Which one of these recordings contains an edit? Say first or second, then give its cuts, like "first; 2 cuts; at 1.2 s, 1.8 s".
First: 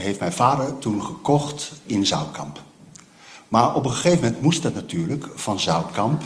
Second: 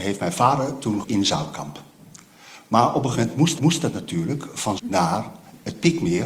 second; 4 cuts; at 1.0 s, 3.1 s, 3.6 s, 4.8 s